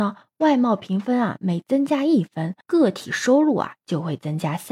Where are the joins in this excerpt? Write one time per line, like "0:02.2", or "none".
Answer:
0:02.6